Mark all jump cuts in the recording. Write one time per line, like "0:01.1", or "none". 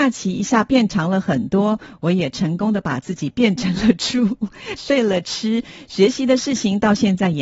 0:04.8